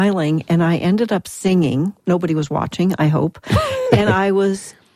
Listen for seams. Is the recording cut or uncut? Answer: uncut